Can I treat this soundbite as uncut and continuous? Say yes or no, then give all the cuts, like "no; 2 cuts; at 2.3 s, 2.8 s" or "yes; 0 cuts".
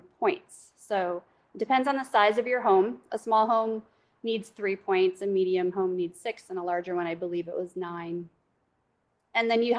yes; 0 cuts